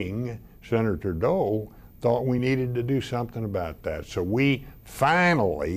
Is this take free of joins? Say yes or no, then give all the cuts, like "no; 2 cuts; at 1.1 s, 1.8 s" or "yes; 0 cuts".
yes; 0 cuts